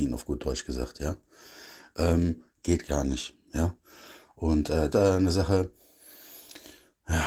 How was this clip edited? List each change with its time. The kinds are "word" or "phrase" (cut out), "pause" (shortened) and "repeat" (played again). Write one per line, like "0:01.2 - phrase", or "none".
0:04.9 - phrase